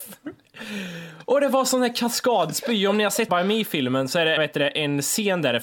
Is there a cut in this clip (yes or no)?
yes